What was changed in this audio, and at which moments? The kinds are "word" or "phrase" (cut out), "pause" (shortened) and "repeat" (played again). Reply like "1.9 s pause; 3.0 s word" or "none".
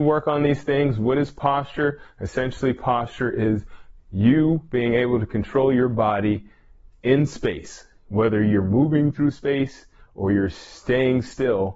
none